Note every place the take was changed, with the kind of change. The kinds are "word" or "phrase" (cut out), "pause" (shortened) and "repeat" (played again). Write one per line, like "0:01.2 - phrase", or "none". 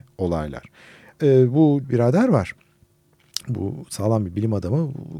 0:01.8 - phrase